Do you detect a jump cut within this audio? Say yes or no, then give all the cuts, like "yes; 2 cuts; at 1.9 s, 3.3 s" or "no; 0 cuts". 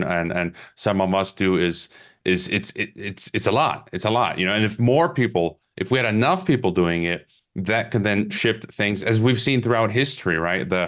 no; 0 cuts